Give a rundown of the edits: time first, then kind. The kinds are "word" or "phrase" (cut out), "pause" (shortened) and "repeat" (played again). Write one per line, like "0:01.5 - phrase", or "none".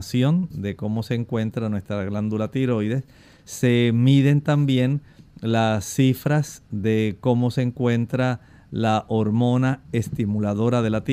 none